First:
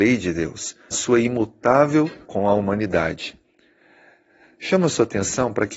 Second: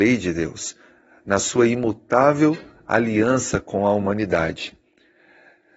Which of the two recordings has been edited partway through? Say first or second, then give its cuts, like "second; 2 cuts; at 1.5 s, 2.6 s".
first; 2 cuts; at 0.9 s, 2.2 s